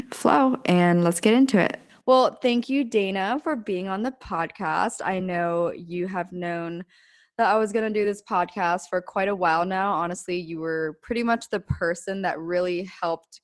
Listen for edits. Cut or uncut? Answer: uncut